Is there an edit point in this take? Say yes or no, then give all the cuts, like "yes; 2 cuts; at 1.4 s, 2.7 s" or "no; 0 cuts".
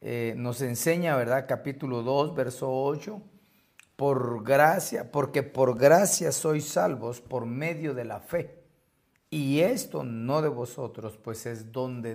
no; 0 cuts